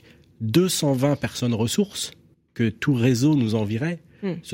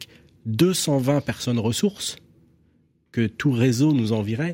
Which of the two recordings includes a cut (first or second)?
first